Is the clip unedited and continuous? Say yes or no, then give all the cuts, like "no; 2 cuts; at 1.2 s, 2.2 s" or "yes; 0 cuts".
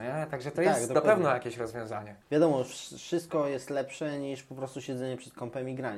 yes; 0 cuts